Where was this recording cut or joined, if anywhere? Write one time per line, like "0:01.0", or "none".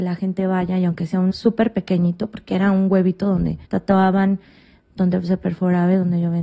0:01.3
0:03.6